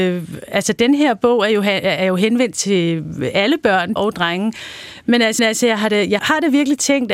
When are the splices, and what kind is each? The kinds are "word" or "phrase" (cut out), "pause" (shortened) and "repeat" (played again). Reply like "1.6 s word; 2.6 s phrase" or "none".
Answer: 4.0 s word; 5.4 s repeat; 6.2 s word